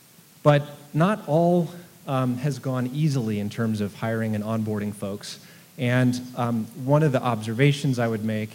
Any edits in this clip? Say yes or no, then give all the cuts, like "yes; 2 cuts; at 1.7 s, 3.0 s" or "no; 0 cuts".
no; 0 cuts